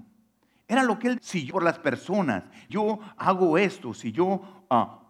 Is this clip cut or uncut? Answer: cut